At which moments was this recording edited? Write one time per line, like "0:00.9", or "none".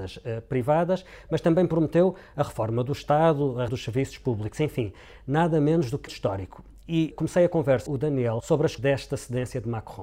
0:03.7
0:06.1
0:07.1
0:07.9
0:08.4
0:08.8